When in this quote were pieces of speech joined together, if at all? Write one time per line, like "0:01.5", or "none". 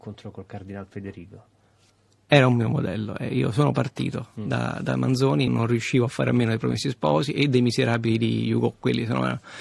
0:05.5